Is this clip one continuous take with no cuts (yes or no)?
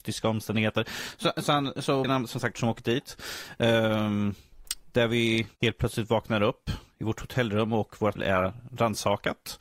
no